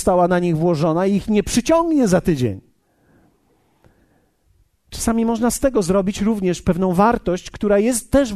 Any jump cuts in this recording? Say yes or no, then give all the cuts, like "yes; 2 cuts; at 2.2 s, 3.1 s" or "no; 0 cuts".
no; 0 cuts